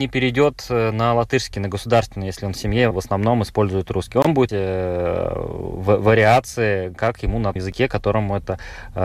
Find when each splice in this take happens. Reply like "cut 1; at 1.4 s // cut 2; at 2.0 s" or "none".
cut 1; at 2.9 s // cut 2; at 4.5 s // cut 3; at 7.6 s

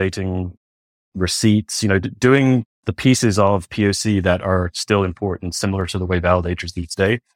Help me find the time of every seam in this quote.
none

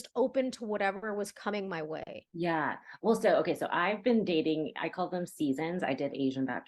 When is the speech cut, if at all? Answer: cut 1; at 2.3 s

